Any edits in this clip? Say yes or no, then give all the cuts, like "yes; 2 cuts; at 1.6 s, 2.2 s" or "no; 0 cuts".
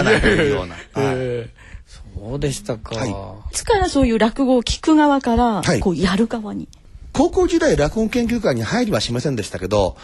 yes; 1 cut; at 3.5 s